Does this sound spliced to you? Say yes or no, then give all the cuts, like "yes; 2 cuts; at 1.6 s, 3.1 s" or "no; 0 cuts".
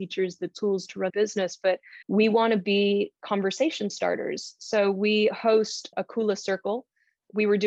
yes; 3 cuts; at 1.1 s, 2.0 s, 5.9 s